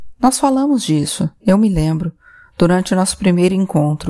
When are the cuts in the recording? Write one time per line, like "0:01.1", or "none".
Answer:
none